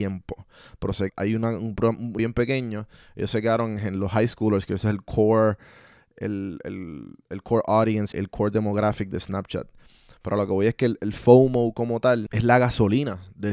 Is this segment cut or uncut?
cut